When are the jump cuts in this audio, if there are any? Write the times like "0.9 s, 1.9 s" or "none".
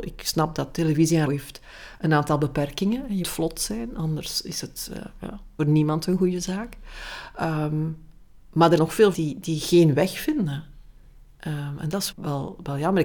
1.3 s, 3.2 s, 5.6 s, 8.8 s, 9.1 s, 12.1 s

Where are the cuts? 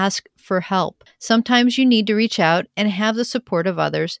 none

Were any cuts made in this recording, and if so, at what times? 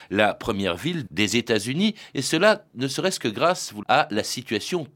1.1 s, 3.8 s

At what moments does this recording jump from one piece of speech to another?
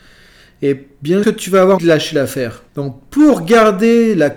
1.2 s, 1.8 s, 2.7 s

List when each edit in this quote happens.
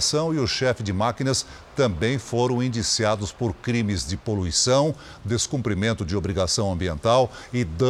none

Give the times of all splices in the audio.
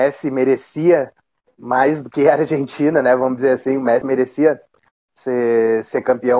none

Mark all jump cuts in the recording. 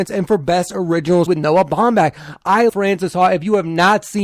1.3 s, 2.7 s

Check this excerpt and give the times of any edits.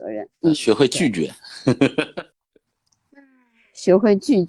2.3 s

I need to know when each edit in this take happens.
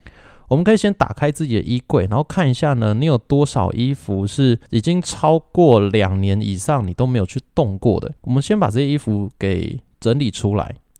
4.7 s, 8.2 s

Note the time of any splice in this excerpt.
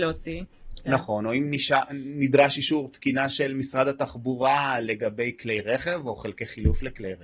none

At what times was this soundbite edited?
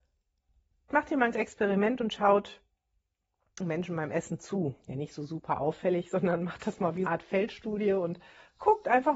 0.9 s, 1.3 s, 3.6 s, 7.1 s

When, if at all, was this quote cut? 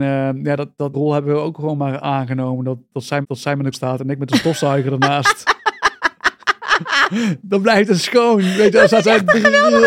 0.9 s, 3.2 s, 3.7 s

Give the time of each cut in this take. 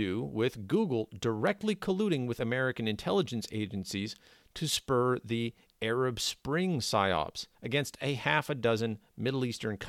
7.5 s

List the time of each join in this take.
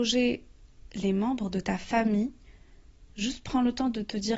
3.1 s

